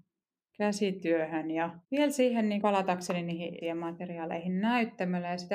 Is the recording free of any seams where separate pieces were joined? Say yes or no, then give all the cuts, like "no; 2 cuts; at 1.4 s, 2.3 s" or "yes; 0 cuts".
no; 3 cuts; at 1.8 s, 2.6 s, 3.6 s